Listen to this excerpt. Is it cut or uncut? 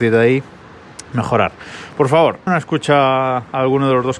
cut